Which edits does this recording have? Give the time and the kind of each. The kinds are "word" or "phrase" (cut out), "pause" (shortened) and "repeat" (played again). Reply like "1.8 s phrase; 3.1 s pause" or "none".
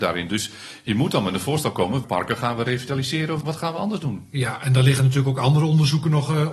2.0 s word; 3.4 s word